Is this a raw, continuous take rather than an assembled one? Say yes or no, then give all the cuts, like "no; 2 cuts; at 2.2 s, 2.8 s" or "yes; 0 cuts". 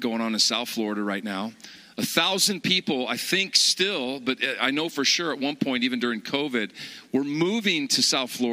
yes; 0 cuts